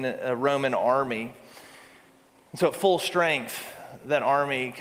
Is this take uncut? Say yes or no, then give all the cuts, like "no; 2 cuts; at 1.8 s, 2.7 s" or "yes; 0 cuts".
yes; 0 cuts